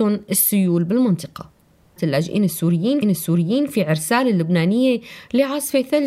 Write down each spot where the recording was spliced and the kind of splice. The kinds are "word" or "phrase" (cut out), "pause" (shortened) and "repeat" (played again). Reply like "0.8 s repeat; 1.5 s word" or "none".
2.0 s phrase; 3.0 s repeat